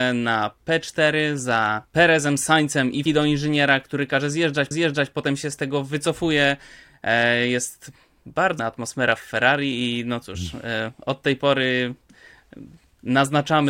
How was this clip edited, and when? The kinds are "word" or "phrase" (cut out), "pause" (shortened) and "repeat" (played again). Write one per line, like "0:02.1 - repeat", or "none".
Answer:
0:01.9 - pause
0:03.1 - phrase
0:04.7 - repeat
0:08.6 - word